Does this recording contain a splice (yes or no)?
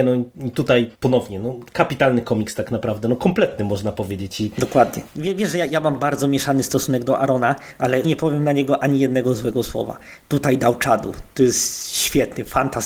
yes